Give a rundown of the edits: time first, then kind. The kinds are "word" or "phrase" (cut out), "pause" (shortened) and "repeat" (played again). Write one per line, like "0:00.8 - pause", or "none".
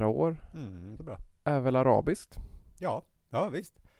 0:01.0 - word